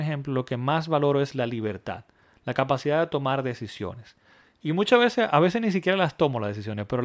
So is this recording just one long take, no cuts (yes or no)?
yes